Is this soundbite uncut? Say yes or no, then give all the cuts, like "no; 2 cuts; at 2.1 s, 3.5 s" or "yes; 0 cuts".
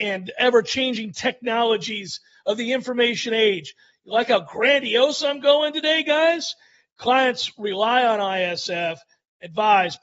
yes; 0 cuts